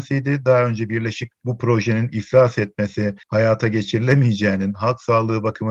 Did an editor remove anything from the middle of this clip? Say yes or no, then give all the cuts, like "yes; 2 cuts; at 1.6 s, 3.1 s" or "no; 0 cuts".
yes; 2 cuts; at 1.3 s, 3.2 s